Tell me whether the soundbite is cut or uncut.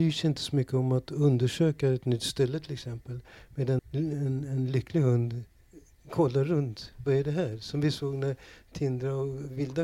cut